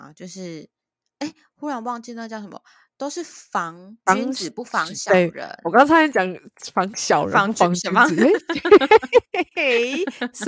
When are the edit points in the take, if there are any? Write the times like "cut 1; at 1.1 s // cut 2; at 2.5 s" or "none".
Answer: none